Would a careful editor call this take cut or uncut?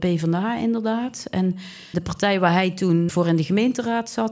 cut